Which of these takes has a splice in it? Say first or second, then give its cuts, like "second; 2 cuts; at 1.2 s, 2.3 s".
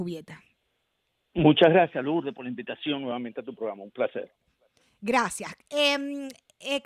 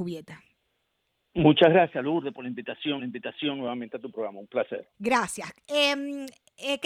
second; 2 cuts; at 3.0 s, 4.9 s